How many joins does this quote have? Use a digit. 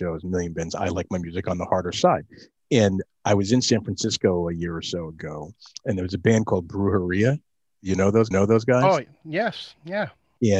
1